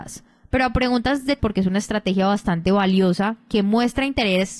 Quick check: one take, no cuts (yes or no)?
no